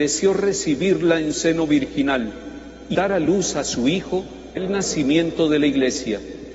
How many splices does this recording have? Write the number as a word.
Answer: three